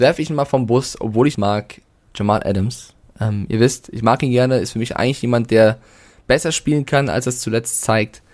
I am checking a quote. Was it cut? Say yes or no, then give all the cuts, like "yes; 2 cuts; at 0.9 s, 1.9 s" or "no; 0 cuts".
yes; 1 cut; at 1.3 s